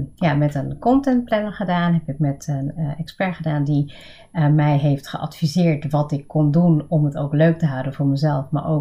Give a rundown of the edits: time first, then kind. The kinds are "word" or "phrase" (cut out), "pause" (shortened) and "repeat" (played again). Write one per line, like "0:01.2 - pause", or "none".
none